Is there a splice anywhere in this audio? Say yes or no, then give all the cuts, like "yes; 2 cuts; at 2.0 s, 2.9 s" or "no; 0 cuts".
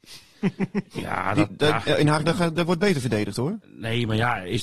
yes; 1 cut; at 2.2 s